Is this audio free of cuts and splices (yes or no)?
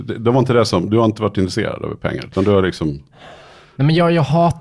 yes